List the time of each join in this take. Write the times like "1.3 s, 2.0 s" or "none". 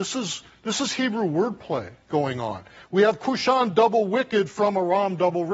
none